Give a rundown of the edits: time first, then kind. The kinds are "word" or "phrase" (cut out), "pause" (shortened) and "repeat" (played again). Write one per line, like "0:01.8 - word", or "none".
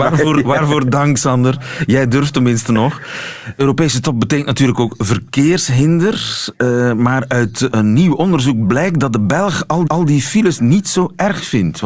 0:07.7 - word
0:09.9 - repeat